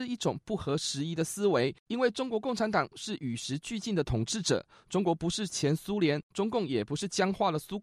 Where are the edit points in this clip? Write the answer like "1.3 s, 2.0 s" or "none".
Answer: none